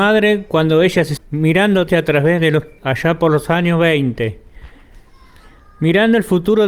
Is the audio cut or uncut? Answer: cut